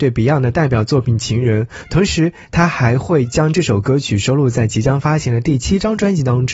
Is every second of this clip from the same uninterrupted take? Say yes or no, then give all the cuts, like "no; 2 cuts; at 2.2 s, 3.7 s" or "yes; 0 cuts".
yes; 0 cuts